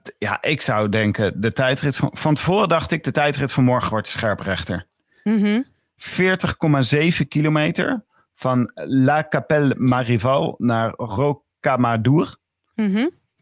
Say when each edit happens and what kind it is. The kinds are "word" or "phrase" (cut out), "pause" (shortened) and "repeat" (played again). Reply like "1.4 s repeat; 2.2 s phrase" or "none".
none